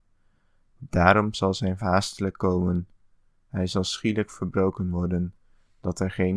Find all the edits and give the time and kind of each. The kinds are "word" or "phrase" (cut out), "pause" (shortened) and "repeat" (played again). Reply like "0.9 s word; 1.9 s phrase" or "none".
1.8 s word